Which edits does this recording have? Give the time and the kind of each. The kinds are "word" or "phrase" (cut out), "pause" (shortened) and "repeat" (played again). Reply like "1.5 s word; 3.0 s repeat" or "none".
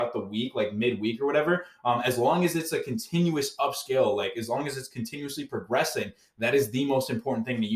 none